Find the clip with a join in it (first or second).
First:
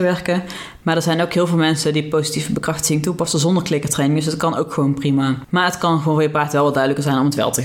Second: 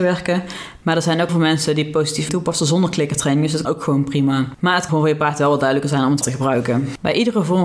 second